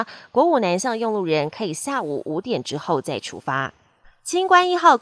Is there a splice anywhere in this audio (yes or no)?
no